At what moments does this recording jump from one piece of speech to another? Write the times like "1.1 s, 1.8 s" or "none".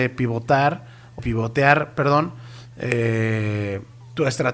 1.2 s